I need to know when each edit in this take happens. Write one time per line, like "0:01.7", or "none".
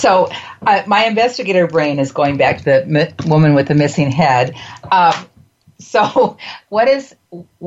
none